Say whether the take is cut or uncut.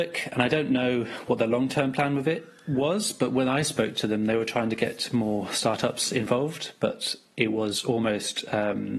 uncut